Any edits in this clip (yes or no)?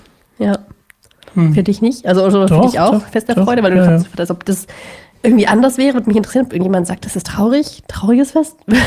no